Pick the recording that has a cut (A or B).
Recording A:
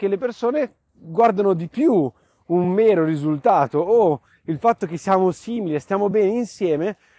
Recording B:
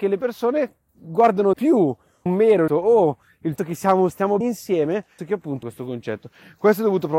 B